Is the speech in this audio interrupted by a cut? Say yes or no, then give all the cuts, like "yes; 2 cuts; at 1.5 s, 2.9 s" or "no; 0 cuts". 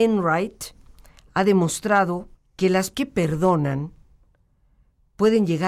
yes; 2 cuts; at 2.3 s, 2.9 s